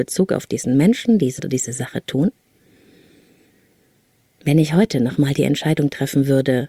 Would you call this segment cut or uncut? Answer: cut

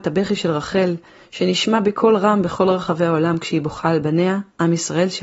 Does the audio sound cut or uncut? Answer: uncut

